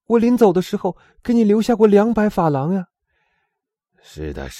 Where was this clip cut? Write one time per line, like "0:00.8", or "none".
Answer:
0:02.9